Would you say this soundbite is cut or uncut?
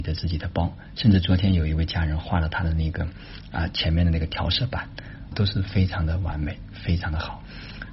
cut